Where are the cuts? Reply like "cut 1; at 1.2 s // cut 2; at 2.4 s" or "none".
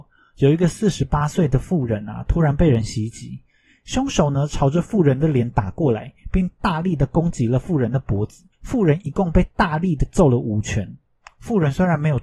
cut 1; at 8.5 s